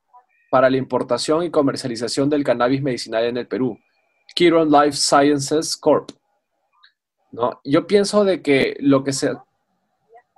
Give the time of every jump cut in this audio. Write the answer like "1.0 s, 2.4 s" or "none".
none